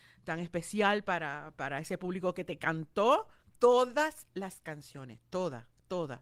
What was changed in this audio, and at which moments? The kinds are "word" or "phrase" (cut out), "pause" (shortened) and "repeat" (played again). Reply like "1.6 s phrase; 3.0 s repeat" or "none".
3.6 s pause

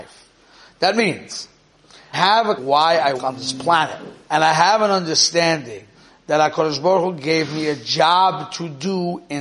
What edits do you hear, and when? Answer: 2.1 s word; 2.6 s phrase; 3.2 s word; 4.2 s pause; 5.9 s pause

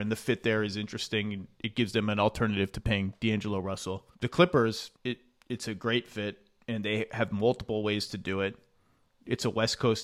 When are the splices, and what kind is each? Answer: 4.1 s pause; 5.0 s pause

